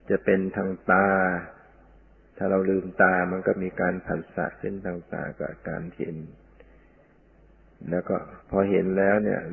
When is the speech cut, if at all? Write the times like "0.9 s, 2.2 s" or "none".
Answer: 2.0 s, 8.4 s